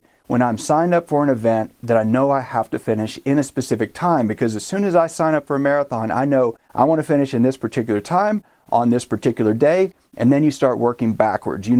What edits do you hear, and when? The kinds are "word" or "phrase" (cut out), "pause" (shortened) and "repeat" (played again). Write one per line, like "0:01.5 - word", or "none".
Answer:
0:06.6 - pause